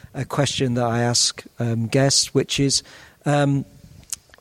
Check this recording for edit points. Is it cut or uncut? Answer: uncut